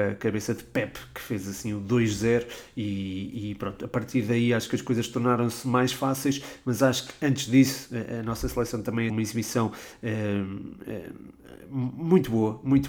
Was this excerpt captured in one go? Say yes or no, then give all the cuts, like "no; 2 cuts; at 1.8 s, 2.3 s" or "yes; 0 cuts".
no; 1 cut; at 9.1 s